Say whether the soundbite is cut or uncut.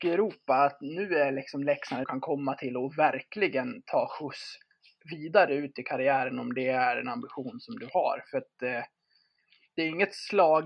cut